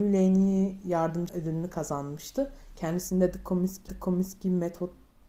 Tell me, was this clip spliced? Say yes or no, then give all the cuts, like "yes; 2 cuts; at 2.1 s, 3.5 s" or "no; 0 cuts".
yes; 2 cuts; at 1.3 s, 3.9 s